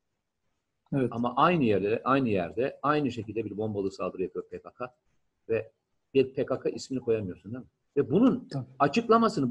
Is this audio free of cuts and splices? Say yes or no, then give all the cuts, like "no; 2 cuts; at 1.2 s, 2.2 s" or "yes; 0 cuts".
no; 1 cut; at 7.9 s